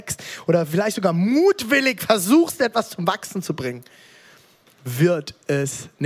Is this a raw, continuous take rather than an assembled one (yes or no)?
yes